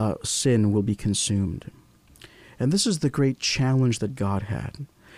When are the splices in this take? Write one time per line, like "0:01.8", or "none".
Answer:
none